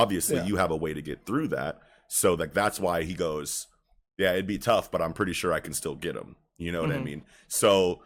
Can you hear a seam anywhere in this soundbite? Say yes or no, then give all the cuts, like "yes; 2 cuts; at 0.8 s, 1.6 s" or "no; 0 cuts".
no; 0 cuts